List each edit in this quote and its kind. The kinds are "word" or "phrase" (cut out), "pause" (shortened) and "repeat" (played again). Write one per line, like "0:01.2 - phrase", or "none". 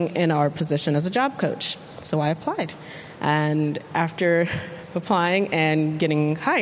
none